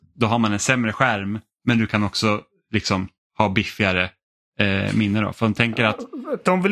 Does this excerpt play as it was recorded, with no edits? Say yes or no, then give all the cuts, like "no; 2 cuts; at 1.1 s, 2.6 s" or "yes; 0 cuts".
yes; 0 cuts